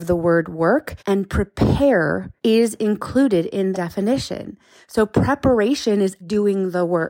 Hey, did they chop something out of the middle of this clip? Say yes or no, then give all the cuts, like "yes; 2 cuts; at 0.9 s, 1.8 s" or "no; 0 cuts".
yes; 4 cuts; at 1.0 s, 2.4 s, 3.7 s, 6.2 s